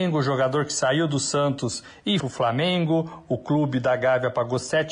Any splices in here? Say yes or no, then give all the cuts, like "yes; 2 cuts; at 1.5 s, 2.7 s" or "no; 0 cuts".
yes; 1 cut; at 2.2 s